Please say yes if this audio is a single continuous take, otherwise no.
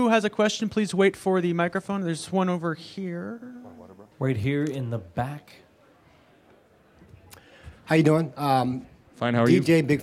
no